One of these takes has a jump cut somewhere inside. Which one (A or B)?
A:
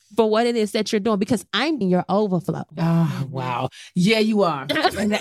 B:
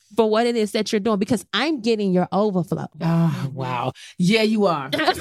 A